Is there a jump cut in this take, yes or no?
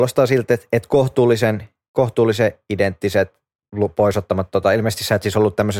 no